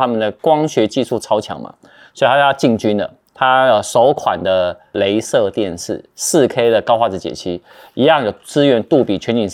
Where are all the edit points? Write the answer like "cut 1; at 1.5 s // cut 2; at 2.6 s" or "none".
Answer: none